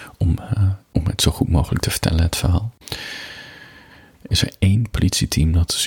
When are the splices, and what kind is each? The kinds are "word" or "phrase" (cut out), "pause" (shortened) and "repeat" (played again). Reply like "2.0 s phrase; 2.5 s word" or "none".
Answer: 4.3 s word

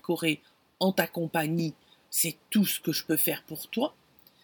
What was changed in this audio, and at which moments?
none

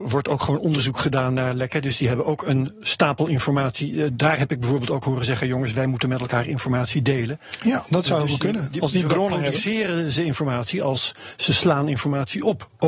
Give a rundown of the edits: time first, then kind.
none

